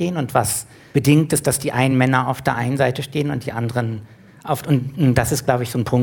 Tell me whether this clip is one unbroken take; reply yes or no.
yes